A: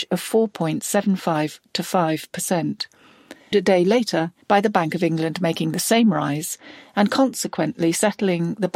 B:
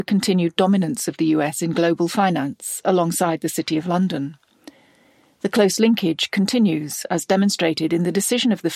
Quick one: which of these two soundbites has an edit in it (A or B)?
A